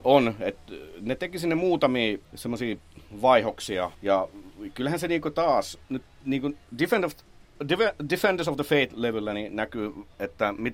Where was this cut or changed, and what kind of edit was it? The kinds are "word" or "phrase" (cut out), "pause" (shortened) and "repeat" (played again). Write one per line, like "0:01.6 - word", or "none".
0:02.2 - pause
0:03.9 - pause
0:05.8 - pause